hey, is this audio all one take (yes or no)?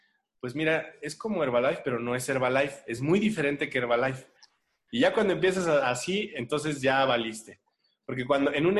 yes